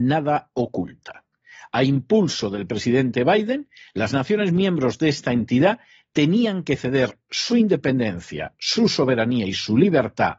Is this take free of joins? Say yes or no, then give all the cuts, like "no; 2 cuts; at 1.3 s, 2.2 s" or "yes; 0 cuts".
yes; 0 cuts